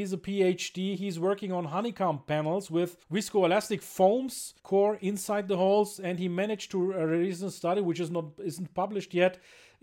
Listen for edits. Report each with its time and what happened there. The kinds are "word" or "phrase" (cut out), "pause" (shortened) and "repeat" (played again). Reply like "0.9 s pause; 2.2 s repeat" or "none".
3.0 s pause; 4.6 s pause